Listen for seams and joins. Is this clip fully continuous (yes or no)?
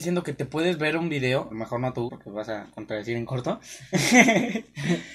no